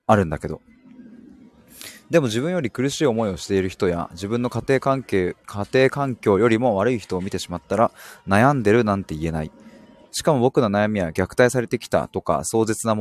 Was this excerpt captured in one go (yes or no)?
yes